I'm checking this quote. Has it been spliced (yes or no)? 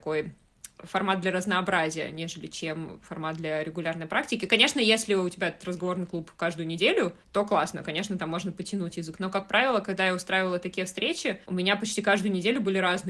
yes